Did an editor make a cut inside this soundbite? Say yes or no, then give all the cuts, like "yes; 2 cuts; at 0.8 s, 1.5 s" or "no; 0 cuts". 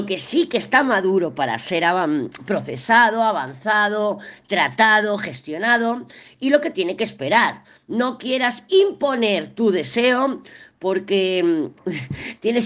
no; 0 cuts